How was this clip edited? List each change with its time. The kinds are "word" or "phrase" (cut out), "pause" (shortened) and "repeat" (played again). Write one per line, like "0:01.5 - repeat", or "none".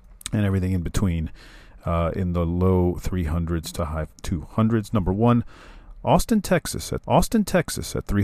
0:07.0 - repeat